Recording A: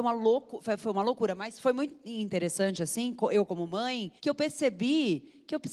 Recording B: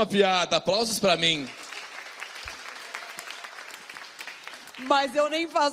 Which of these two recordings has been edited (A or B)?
A